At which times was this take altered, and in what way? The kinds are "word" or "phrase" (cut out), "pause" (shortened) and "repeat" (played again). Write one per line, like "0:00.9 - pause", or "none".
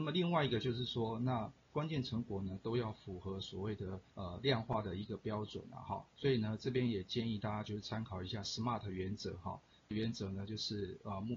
0:04.1 - pause
0:06.1 - pause
0:09.9 - word